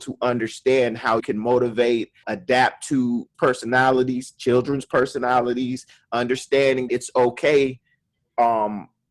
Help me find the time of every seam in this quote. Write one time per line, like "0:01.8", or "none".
0:01.2
0:02.2
0:03.3
0:06.9